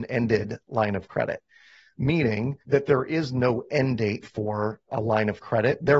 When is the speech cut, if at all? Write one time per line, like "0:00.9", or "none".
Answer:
0:02.6
0:04.2
0:04.9